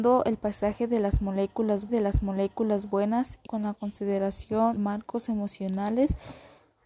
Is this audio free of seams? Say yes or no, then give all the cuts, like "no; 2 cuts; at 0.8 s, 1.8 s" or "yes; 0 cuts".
no; 3 cuts; at 1.9 s, 3.4 s, 4.8 s